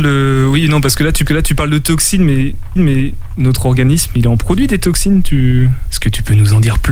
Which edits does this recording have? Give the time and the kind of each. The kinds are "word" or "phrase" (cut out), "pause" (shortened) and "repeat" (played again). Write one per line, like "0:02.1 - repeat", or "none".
0:01.3 - repeat
0:02.8 - repeat

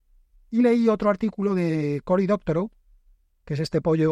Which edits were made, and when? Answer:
none

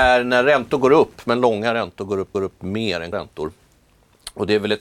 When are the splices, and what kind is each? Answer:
0:02.3 - repeat
0:03.1 - word

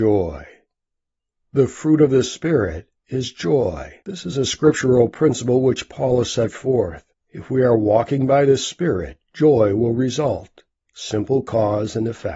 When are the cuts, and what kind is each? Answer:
0:03.0 - pause
0:04.0 - pause
0:07.1 - pause
0:09.2 - pause
0:10.8 - pause

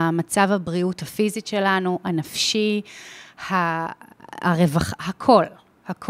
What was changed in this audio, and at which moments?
none

